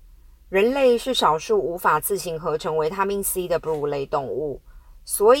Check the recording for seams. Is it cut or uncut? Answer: uncut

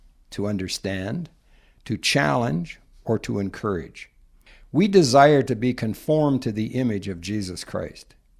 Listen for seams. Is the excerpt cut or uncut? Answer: uncut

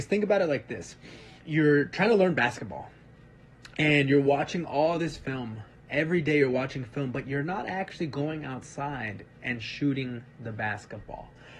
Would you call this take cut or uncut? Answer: cut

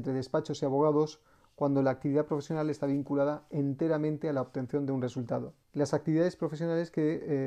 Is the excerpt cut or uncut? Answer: cut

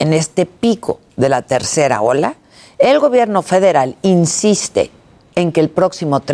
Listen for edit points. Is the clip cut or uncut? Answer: uncut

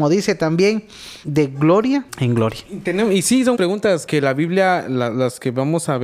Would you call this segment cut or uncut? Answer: cut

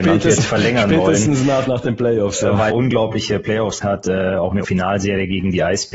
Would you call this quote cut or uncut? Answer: cut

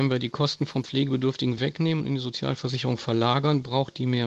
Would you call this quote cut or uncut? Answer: uncut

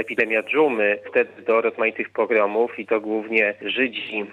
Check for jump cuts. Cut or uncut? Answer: cut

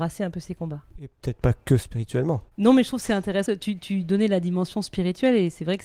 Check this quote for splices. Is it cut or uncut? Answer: cut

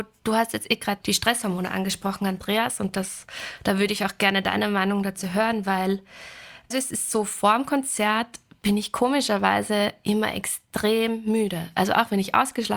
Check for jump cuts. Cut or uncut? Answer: cut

